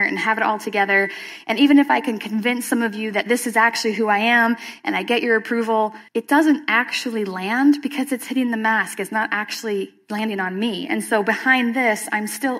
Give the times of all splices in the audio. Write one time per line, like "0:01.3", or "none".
0:06.1